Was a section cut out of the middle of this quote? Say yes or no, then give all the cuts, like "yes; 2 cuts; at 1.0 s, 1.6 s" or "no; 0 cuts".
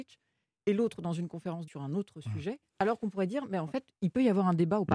yes; 2 cuts; at 1.7 s, 2.7 s